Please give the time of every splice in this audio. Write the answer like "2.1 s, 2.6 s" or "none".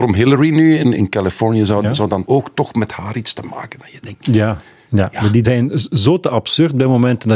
0.9 s, 2.2 s, 5.4 s